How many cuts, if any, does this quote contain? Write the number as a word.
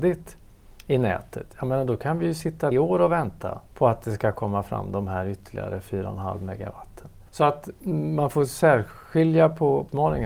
three